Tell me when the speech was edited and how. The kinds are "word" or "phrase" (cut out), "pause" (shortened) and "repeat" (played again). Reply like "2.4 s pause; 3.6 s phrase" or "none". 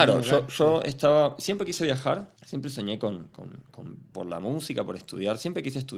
2.4 s pause; 4.1 s word